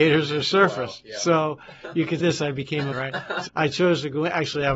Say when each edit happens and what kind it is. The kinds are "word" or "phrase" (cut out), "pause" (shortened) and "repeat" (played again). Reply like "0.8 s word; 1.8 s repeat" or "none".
2.2 s word; 2.9 s word; 3.5 s word